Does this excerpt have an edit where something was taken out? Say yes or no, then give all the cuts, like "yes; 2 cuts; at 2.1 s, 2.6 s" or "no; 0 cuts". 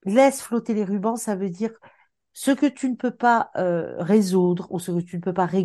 no; 0 cuts